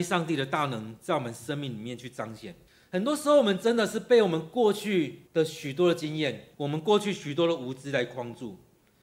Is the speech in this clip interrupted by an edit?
yes; 3 cuts; at 2.7 s, 5.3 s, 6.5 s

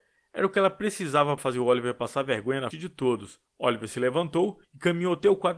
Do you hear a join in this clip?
yes; 4 cuts; at 1.4 s, 2.7 s, 3.5 s, 4.6 s

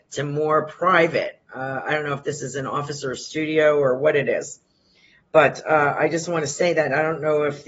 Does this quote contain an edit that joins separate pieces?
no; 0 cuts

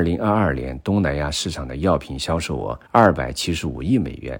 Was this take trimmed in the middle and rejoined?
yes; 1 cut; at 2.9 s

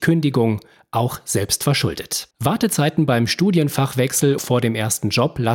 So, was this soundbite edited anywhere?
yes; 2 cuts; at 2.3 s, 4.4 s

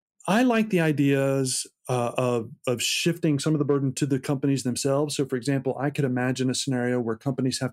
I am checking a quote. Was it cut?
no; 0 cuts

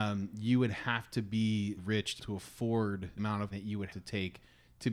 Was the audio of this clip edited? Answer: yes; 5 cuts; at 1.8 s, 2.2 s, 3.2 s, 3.5 s, 3.9 s

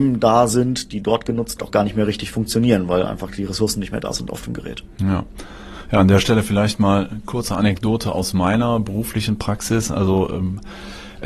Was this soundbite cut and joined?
yes; 1 cut; at 1.6 s

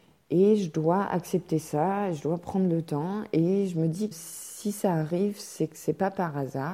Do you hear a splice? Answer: yes; 1 cut; at 4.1 s

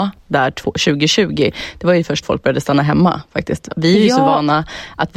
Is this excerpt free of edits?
no; 1 cut; at 2.2 s

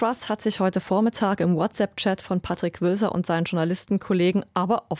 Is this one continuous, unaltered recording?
yes; 0 cuts

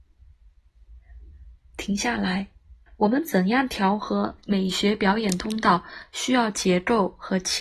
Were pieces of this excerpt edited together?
yes; 1 cut; at 2.9 s

